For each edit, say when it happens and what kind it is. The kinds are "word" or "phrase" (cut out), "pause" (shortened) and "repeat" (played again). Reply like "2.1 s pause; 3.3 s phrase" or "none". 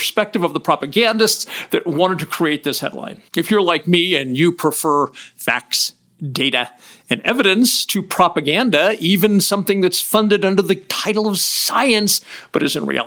3.3 s pause